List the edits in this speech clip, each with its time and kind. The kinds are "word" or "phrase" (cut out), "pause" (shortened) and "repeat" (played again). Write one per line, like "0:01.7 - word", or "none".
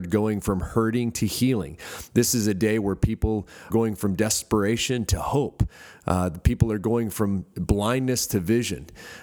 0:03.7 - word